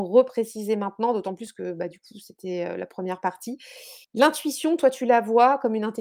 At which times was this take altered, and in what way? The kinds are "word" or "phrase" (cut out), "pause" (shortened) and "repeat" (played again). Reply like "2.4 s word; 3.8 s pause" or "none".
4.0 s pause